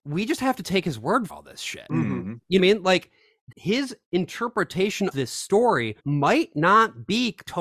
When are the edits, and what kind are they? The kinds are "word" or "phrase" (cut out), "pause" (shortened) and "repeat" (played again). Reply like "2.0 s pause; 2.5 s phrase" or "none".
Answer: 1.3 s word; 2.6 s phrase; 3.5 s word; 5.1 s word; 6.0 s pause